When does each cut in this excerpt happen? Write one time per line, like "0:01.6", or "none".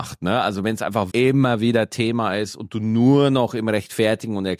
0:01.1